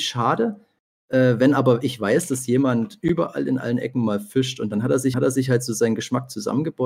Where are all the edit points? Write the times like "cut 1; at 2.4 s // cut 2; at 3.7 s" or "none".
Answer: cut 1; at 5.1 s